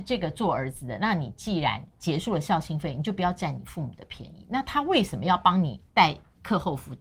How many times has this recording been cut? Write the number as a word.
two